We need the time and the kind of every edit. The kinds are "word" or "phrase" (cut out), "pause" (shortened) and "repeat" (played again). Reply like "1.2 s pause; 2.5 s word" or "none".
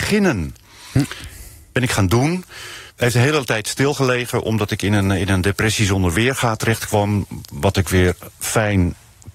2.9 s pause; 8.3 s pause